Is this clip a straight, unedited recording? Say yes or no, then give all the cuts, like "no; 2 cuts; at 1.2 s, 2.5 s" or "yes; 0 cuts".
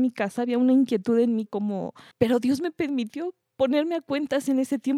no; 2 cuts; at 1.5 s, 2.1 s